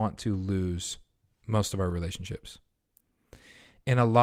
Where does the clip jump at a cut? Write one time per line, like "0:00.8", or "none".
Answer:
none